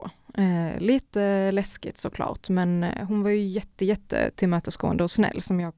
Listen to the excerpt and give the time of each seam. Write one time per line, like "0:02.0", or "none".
none